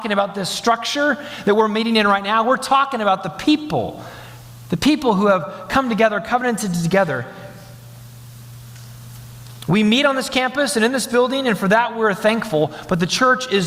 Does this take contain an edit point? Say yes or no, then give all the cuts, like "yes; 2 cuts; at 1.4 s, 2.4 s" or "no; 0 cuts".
no; 0 cuts